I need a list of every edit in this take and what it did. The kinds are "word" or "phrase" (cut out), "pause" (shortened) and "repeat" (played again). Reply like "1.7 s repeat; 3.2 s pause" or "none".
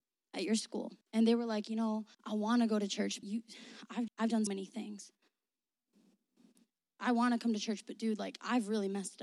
1.0 s pause; 2.1 s pause; 3.2 s word; 4.1 s word; 4.5 s word

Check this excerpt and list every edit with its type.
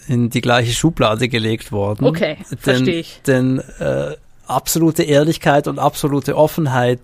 4.2 s pause

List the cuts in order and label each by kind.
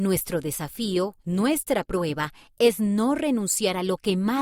1.2 s pause

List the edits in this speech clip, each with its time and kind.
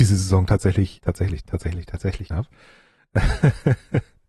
1.0 s word; 1.4 s word; 2.3 s word

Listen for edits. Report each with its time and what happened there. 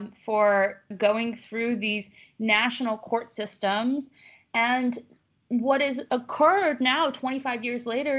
0.9 s word

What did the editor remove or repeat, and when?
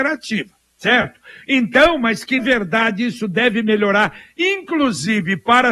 2.4 s word

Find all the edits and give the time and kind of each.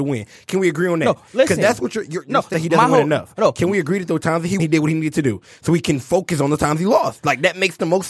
2.5 s phrase; 4.6 s word

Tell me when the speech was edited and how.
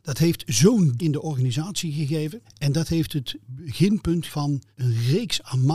1.0 s word; 2.4 s pause; 4.3 s word; 4.7 s pause

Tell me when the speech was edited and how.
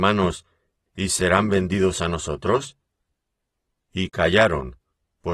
none

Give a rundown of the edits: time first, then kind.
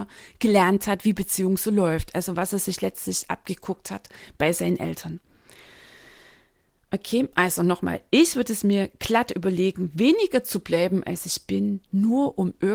none

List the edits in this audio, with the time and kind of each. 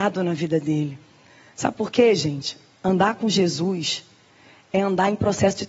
none

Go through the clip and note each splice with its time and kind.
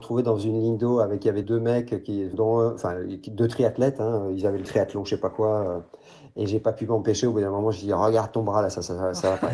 1.4 s word; 2.3 s word; 4.7 s word

